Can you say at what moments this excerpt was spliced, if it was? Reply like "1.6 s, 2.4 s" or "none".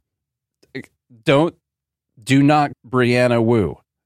2.7 s